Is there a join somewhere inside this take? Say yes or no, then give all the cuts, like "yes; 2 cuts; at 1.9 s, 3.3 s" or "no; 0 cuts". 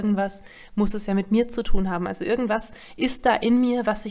no; 0 cuts